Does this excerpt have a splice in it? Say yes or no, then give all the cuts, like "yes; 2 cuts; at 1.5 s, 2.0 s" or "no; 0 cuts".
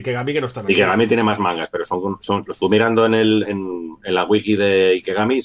no; 0 cuts